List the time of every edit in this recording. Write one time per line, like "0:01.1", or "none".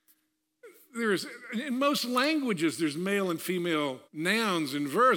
0:04.0